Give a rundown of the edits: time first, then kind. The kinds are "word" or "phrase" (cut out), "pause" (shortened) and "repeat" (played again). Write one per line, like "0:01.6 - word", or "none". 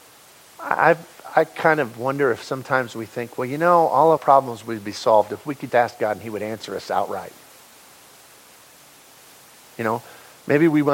0:04.2 - word
0:05.7 - word